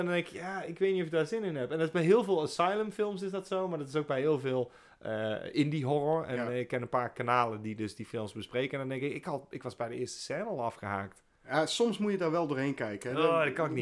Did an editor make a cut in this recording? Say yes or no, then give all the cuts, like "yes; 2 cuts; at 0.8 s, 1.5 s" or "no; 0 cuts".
no; 0 cuts